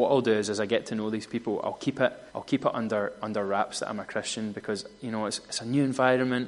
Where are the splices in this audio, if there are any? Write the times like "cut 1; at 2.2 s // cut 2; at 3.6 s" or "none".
cut 1; at 2.3 s